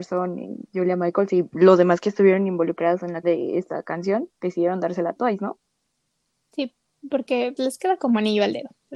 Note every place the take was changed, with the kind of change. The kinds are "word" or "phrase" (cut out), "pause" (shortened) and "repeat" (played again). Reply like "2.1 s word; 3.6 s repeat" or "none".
3.2 s word; 7.6 s word